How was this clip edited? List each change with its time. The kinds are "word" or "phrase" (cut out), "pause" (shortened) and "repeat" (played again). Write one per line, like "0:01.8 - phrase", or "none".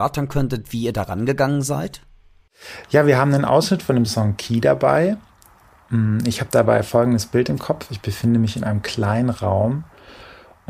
none